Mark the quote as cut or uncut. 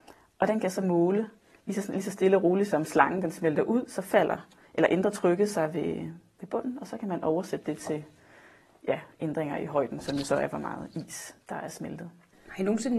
uncut